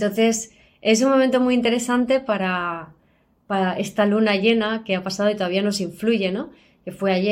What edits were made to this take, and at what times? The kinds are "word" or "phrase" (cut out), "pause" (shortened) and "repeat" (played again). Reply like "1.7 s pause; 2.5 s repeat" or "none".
none